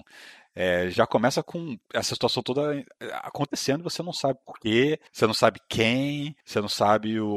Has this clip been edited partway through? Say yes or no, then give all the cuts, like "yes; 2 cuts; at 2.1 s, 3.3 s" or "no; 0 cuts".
yes; 3 cuts; at 1.8 s, 5.1 s, 6.4 s